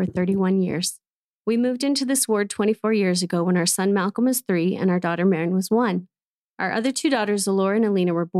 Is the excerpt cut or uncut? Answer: uncut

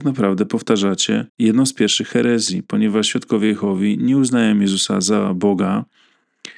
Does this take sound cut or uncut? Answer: cut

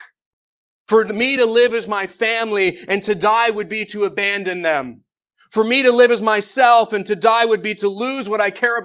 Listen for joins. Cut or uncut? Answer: uncut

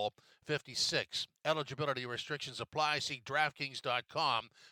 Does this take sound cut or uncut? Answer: cut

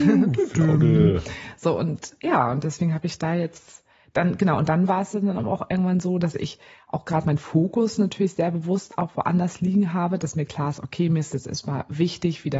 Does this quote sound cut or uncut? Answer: uncut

